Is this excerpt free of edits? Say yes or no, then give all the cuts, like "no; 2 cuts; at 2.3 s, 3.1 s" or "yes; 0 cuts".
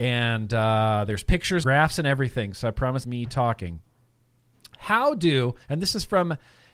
no; 3 cuts; at 1.6 s, 3.0 s, 5.6 s